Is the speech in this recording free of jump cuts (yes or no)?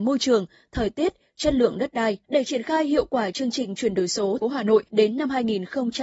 no